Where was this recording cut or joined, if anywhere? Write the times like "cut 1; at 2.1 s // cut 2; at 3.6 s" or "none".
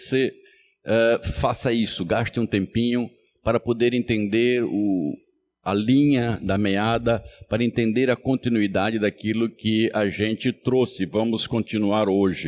none